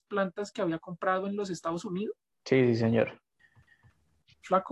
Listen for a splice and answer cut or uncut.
cut